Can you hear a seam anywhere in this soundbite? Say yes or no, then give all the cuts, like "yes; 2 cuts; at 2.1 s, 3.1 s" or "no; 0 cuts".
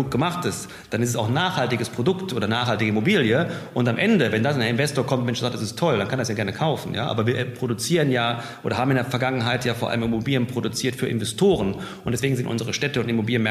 no; 0 cuts